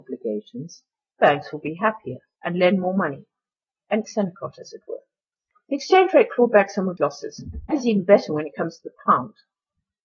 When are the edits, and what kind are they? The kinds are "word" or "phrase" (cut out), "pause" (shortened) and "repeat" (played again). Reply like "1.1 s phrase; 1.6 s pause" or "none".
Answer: 1.2 s word; 2.4 s word; 4.0 s word; 7.0 s word; 7.7 s word